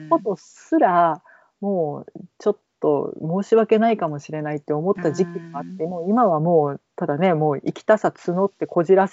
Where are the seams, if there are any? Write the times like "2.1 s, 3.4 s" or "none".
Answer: none